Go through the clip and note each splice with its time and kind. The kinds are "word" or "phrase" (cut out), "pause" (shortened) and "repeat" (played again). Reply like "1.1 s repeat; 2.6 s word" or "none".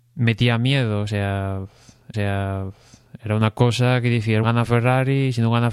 2.1 s repeat; 4.4 s word